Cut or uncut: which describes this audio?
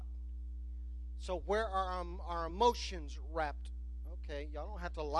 uncut